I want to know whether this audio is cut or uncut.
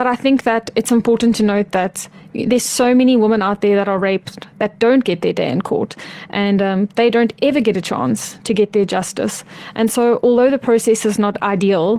uncut